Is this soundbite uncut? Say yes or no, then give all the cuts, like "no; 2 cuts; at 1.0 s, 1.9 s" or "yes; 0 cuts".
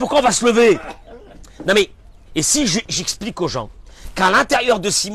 yes; 0 cuts